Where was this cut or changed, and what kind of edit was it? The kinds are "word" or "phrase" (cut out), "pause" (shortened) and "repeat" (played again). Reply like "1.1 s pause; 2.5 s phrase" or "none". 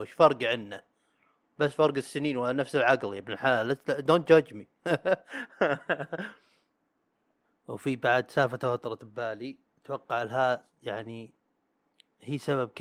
none